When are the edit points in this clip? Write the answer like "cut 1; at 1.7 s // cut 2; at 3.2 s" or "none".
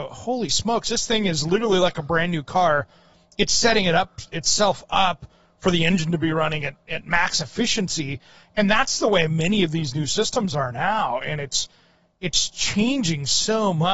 none